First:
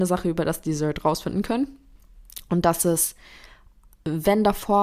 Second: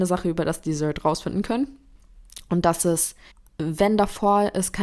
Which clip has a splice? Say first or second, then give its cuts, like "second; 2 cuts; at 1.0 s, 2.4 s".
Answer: second; 1 cut; at 3.3 s